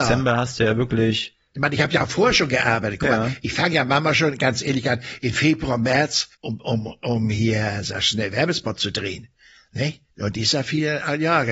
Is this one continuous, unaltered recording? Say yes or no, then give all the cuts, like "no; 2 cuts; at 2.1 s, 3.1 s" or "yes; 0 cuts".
no; 2 cuts; at 6.3 s, 10.1 s